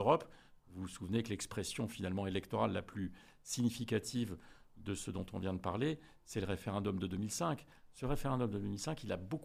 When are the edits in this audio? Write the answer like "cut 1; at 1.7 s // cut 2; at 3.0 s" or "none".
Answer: none